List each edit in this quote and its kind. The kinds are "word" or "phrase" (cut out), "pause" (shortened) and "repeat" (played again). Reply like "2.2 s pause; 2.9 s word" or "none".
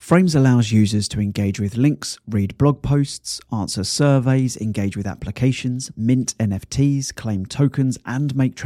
none